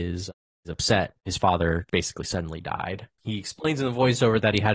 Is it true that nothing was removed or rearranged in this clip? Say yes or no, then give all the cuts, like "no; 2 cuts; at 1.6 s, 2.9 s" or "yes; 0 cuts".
no; 3 cuts; at 1.2 s, 1.9 s, 3.1 s